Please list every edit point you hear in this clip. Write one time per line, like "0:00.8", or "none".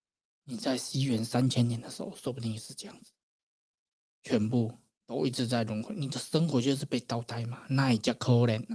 none